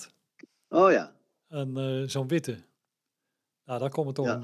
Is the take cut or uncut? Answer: uncut